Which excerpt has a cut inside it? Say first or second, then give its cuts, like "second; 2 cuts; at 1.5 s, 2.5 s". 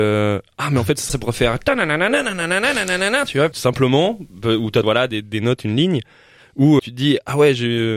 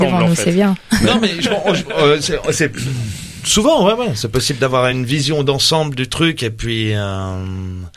first; 5 cuts; at 1.1 s, 3.5 s, 4.8 s, 5.2 s, 6.8 s